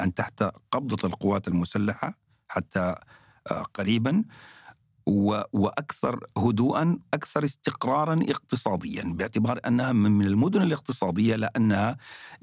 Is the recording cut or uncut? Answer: cut